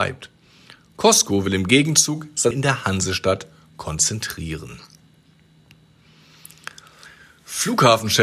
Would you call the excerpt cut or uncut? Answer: cut